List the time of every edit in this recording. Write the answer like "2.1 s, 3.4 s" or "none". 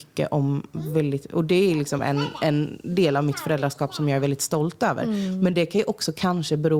none